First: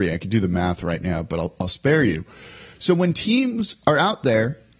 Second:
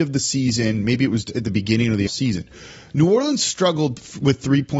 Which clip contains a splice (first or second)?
second